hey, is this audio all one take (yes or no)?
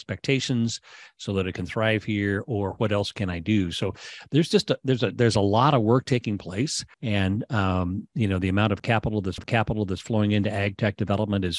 no